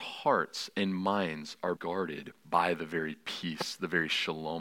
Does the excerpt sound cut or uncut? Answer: cut